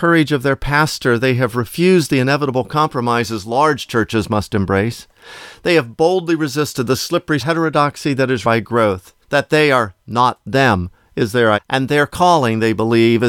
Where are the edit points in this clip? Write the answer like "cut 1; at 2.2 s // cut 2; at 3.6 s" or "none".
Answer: cut 1; at 7.4 s // cut 2; at 8.4 s // cut 3; at 9.2 s // cut 4; at 11.5 s

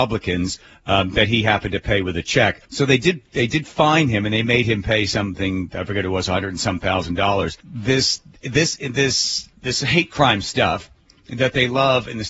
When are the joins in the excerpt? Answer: cut 1; at 2.6 s // cut 2; at 7.6 s // cut 3; at 9.5 s

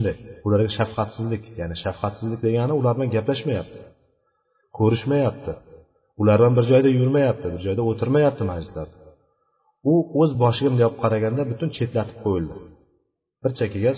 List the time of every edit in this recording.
none

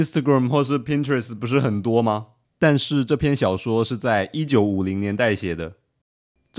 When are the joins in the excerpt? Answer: cut 1; at 2.4 s

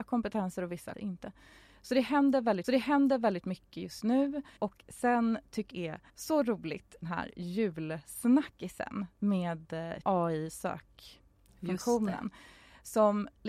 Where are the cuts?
cut 1; at 0.9 s // cut 2; at 2.6 s // cut 3; at 4.6 s // cut 4; at 5.7 s // cut 5; at 6.1 s // cut 6; at 7.0 s // cut 7; at 10.0 s

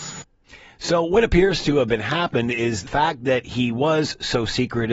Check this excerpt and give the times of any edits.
cut 1; at 2.9 s

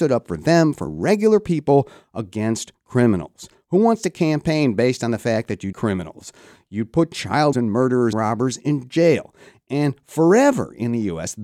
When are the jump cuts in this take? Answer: cut 1; at 5.7 s // cut 2; at 7.5 s // cut 3; at 8.1 s

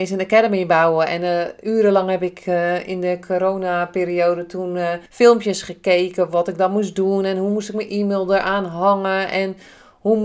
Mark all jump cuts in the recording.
cut 1; at 5.1 s

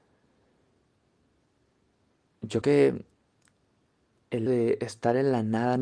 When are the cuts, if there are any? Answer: cut 1; at 2.6 s // cut 2; at 4.5 s

